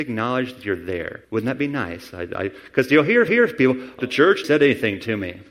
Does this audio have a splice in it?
yes; 4 cuts; at 1.2 s, 3.3 s, 4.0 s, 4.4 s

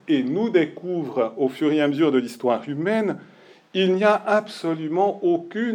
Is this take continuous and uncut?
yes; 0 cuts

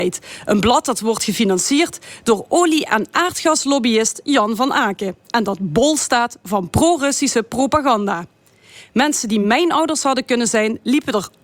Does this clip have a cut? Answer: no; 0 cuts

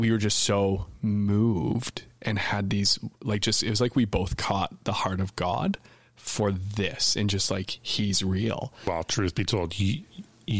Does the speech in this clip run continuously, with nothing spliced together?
yes; 0 cuts

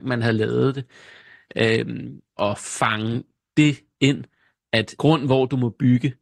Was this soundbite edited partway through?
yes; 2 cuts; at 2.4 s, 5.0 s

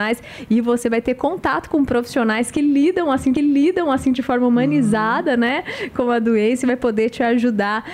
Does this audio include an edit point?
yes; 1 cut; at 3.4 s

